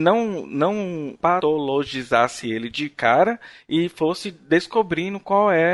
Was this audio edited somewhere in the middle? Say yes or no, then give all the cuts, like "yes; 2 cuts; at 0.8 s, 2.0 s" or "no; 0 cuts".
no; 0 cuts